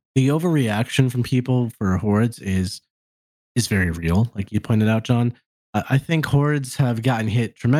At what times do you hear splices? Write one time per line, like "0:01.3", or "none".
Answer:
none